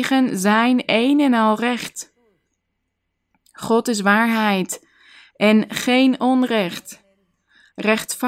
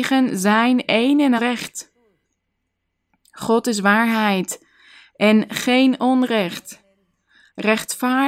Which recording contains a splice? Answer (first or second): second